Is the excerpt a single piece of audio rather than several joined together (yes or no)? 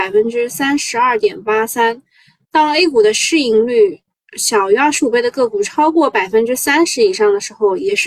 yes